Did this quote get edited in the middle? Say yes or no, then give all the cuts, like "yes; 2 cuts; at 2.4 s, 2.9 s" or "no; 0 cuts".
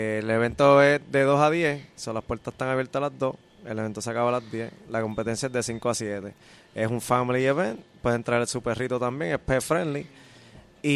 no; 0 cuts